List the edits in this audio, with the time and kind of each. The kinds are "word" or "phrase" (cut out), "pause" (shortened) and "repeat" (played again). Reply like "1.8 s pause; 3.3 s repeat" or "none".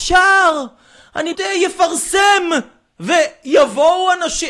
1.3 s word